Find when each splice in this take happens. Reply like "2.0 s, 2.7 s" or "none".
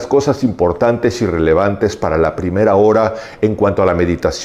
none